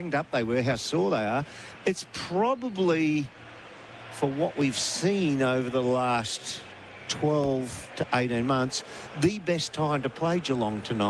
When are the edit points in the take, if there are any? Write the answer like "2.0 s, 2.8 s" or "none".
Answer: none